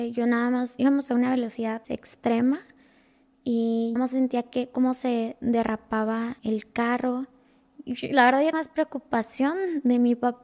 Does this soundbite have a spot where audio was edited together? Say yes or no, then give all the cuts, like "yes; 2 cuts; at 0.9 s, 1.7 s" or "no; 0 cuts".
yes; 4 cuts; at 1.8 s, 4.0 s, 6.4 s, 8.5 s